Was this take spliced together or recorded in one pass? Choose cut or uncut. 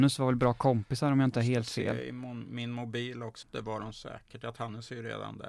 cut